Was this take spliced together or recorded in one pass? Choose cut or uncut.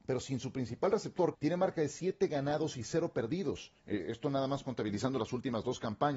cut